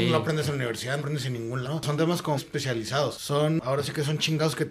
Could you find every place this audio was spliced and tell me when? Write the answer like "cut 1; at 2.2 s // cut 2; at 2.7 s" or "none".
cut 1; at 1.0 s // cut 2; at 1.6 s // cut 3; at 2.4 s